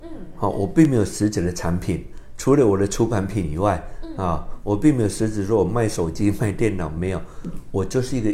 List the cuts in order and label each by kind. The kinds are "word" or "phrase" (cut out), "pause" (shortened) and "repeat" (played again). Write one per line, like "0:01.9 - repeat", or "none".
none